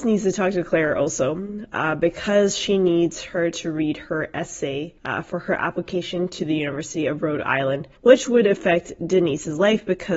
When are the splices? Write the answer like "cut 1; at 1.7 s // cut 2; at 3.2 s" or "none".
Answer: cut 1; at 5.0 s // cut 2; at 8.0 s